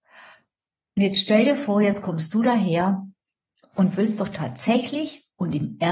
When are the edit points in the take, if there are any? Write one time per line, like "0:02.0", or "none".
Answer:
0:03.5